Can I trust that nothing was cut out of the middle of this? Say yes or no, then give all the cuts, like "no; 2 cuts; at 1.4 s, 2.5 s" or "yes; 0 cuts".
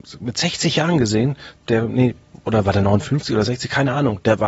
no; 1 cut; at 1.6 s